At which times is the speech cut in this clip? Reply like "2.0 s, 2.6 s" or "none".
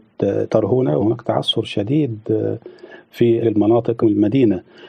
1.0 s, 3.4 s, 4.0 s